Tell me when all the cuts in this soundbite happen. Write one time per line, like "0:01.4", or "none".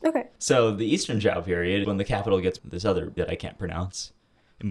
0:01.8
0:02.6
0:03.2

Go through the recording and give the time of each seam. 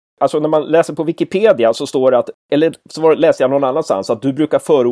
none

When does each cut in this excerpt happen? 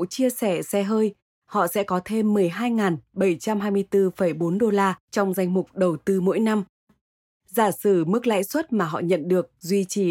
none

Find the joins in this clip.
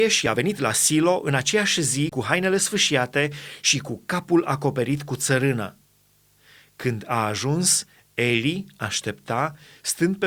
none

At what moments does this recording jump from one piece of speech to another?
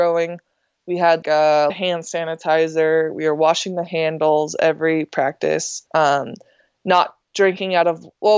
0:01.2
0:01.7
0:05.9
0:07.2

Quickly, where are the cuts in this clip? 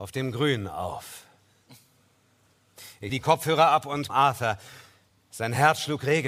0:03.1
0:04.1

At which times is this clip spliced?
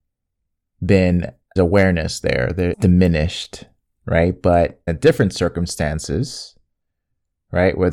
0:01.6
0:02.7
0:04.9

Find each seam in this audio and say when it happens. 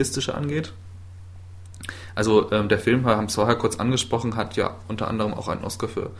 none

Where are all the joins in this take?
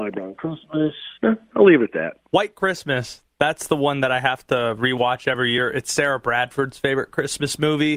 0:01.2
0:02.3

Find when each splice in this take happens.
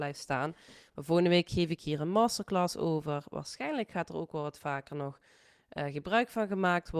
none

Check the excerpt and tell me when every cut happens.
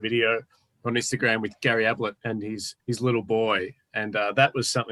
0:02.2
0:02.8

